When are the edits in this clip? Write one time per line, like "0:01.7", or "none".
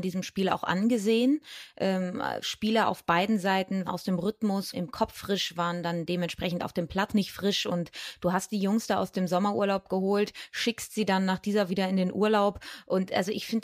0:02.4
0:03.9
0:04.7
0:05.2
0:07.1
0:11.7